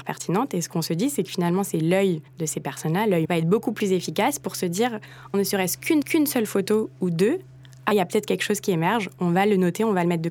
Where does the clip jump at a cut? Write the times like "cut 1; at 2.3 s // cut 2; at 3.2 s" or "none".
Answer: cut 1; at 2.3 s // cut 2; at 3.2 s // cut 3; at 5.3 s // cut 4; at 6.0 s // cut 5; at 7.9 s